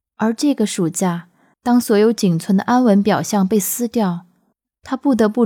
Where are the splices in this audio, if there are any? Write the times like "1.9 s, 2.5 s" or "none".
none